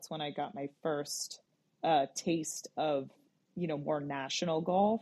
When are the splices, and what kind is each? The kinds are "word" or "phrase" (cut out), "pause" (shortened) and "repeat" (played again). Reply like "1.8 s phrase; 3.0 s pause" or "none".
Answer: none